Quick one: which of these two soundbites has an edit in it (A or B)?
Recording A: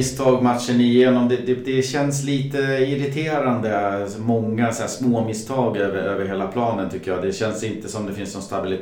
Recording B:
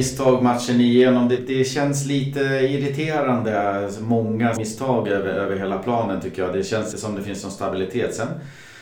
B